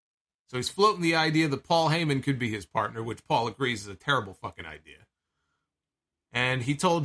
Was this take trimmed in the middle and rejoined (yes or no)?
no